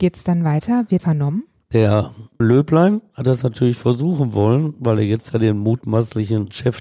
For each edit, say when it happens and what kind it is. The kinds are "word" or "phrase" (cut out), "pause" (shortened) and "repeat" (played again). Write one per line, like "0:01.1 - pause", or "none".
0:01.0 - word
0:02.4 - word

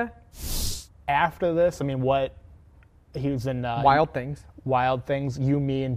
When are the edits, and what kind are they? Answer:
none

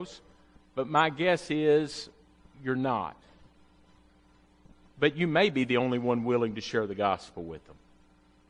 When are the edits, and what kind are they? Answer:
none

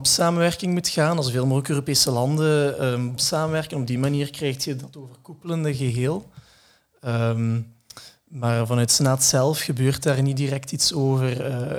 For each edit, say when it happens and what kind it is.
0:03.2 - word

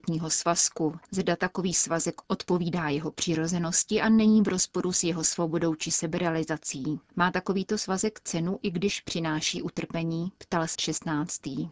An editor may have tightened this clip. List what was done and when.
0:01.0 - pause
0:07.1 - pause
0:10.7 - word

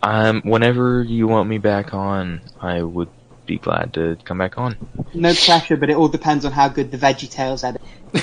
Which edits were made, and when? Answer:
none

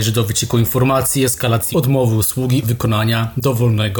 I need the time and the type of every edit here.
0:01.7 - word
0:02.6 - word

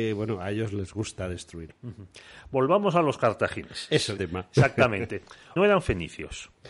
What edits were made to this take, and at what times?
0:04.2 - phrase
0:05.6 - phrase

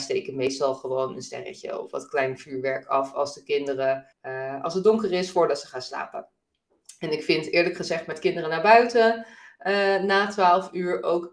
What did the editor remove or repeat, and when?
0:04.1 - pause

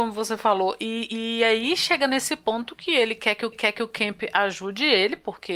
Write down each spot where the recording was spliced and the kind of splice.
0:03.5 - repeat

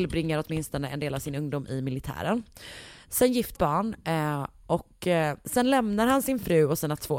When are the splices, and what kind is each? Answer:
0:03.5 - phrase

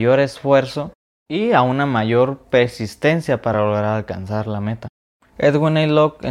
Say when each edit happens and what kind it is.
none

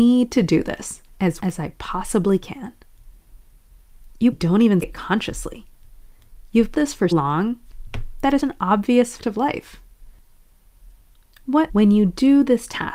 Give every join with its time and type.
0:01.4 - word
0:04.3 - word
0:04.8 - word
0:06.7 - word
0:07.1 - word
0:08.4 - word
0:09.2 - word
0:11.7 - word

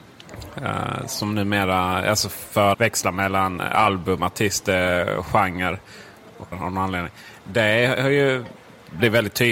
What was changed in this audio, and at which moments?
0:02.7 - word
0:06.5 - word

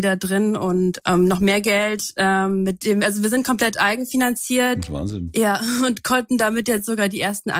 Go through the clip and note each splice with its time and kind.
0:01.0 - word

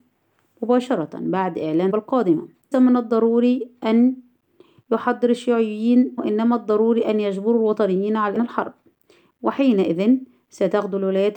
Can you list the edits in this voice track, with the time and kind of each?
0:01.9 - word
0:02.7 - word
0:06.2 - word
0:08.4 - word

